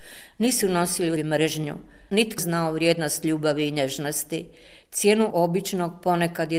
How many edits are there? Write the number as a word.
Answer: three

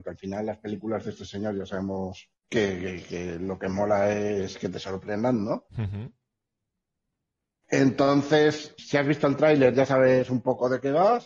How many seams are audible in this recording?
three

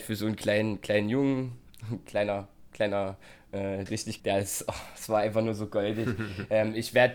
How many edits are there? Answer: two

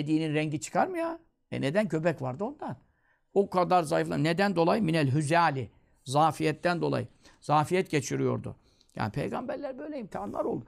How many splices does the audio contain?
zero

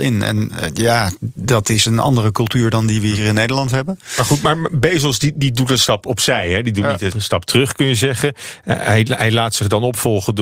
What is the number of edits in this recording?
one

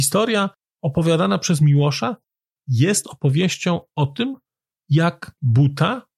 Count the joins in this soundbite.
zero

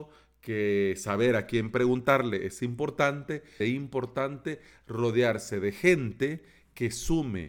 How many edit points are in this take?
one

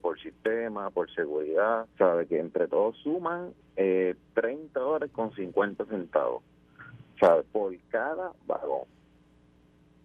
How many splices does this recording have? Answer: one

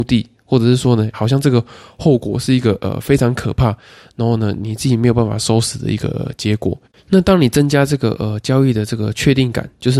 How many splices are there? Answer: two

